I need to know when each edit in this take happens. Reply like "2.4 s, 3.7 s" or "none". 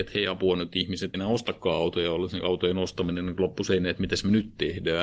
1.1 s